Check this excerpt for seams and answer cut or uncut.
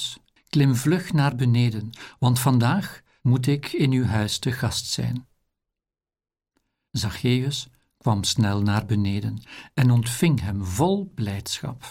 uncut